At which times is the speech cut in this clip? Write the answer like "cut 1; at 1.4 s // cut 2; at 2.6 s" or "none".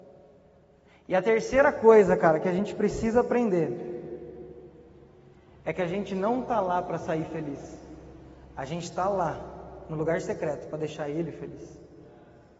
none